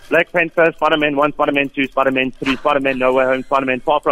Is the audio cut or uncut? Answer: uncut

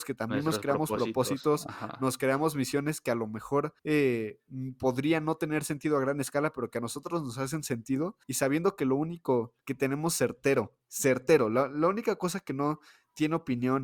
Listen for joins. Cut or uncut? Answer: cut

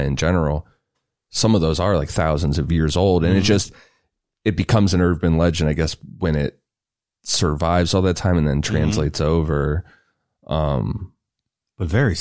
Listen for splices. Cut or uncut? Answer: uncut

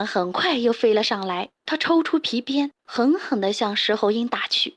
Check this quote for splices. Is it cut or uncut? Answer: cut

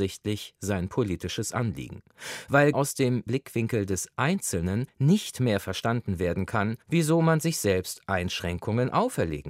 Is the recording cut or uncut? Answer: cut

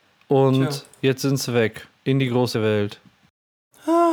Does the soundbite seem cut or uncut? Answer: cut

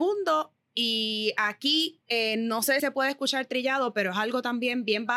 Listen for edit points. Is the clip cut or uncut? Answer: cut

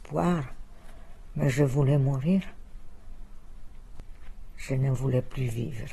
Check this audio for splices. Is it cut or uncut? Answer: uncut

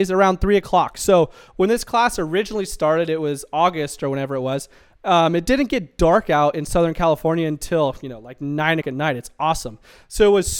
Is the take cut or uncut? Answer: cut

